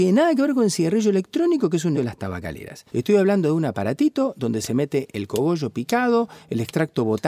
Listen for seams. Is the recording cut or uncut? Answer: cut